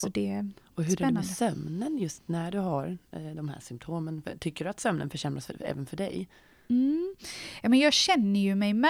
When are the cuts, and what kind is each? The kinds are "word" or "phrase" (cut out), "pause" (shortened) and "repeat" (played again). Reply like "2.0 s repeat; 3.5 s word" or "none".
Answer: none